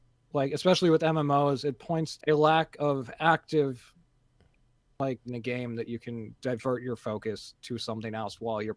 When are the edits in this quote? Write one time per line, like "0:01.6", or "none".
0:02.2
0:05.3